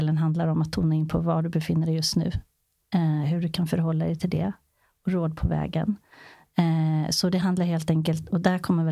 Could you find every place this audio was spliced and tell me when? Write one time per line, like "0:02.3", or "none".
none